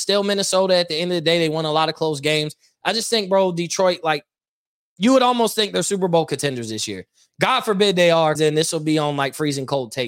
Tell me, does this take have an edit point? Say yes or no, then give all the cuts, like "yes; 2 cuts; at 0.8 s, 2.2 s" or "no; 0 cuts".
yes; 1 cut; at 8.3 s